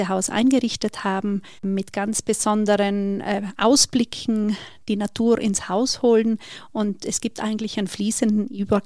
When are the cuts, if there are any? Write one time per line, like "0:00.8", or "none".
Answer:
0:01.6

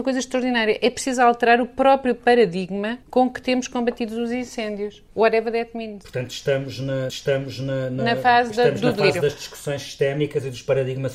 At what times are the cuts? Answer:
0:03.0
0:05.1
0:07.1

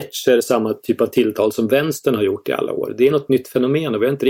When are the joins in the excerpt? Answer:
none

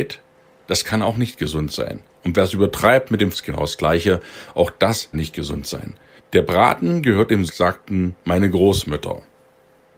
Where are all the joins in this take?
0:03.3
0:05.1
0:06.2
0:07.5

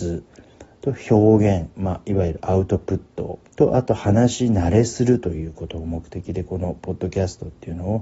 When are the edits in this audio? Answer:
0:03.5

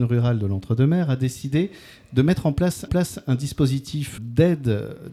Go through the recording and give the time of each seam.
0:02.9
0:04.2

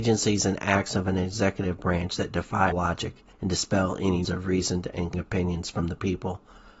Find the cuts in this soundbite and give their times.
0:02.7
0:03.3
0:04.2
0:05.1

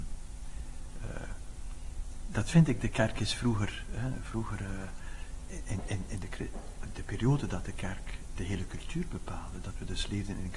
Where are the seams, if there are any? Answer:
none

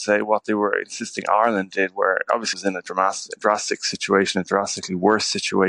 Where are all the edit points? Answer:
0:02.5

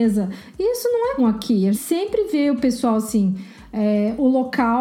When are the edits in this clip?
0:01.2
0:01.7

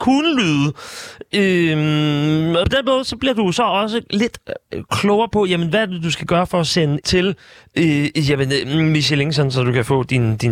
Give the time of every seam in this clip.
0:02.6
0:07.0

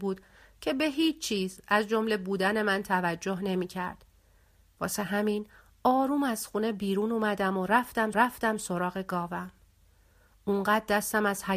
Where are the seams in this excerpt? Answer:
0:08.1

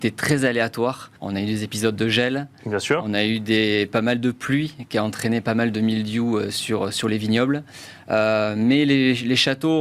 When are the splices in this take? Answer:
0:01.2

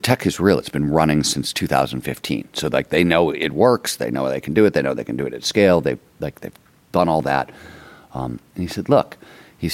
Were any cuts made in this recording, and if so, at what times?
none

